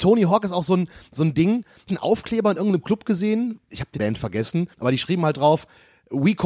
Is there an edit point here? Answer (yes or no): yes